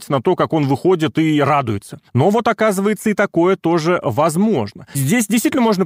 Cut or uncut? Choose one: uncut